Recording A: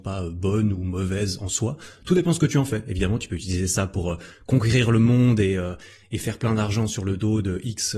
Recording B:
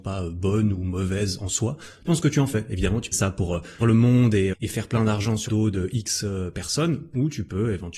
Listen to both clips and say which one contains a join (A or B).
B